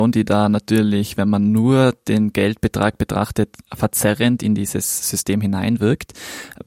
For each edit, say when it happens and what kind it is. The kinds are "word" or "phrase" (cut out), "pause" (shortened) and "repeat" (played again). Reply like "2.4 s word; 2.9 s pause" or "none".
none